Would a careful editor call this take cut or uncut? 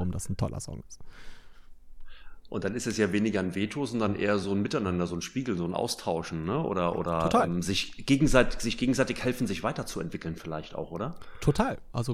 uncut